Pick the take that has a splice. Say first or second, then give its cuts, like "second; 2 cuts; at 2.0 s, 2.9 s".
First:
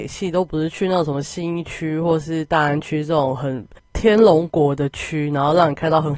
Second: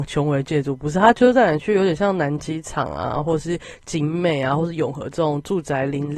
first; 1 cut; at 3.8 s